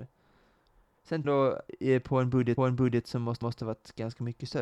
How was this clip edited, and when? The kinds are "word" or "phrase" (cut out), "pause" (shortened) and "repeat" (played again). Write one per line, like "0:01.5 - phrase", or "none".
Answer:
0:01.2 - word
0:02.6 - repeat
0:03.4 - repeat